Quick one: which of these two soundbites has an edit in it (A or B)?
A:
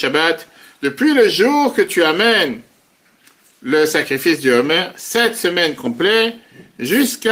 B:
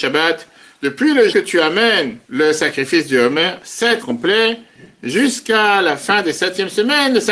B